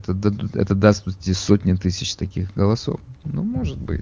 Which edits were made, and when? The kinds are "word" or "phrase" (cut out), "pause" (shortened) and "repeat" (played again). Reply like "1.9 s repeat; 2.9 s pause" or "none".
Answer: none